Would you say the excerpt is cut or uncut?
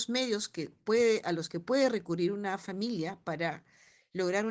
uncut